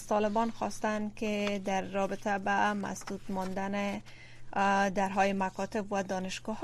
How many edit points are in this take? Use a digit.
0